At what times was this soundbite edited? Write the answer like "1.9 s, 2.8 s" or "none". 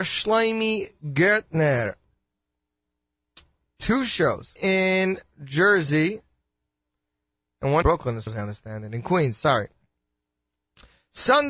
4.6 s, 7.8 s, 8.3 s

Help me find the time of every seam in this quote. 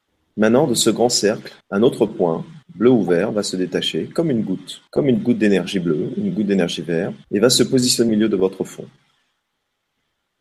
1.6 s, 2.6 s, 4.9 s, 7.2 s, 8.1 s

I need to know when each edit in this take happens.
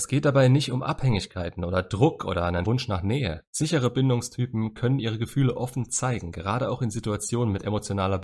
2.6 s, 3.5 s

